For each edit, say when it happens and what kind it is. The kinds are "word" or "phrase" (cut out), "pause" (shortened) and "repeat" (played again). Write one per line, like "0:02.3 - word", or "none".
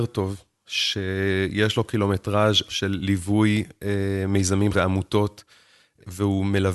0:02.7 - word
0:04.7 - word